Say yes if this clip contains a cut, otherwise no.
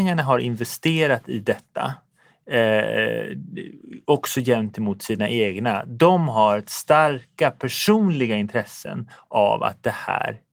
no